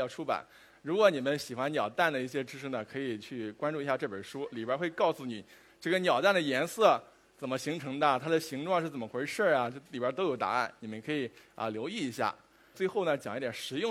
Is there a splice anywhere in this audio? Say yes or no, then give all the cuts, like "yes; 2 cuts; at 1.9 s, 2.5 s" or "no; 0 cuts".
no; 0 cuts